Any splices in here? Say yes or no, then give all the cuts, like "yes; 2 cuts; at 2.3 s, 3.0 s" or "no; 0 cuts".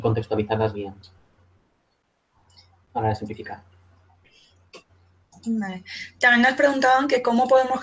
no; 0 cuts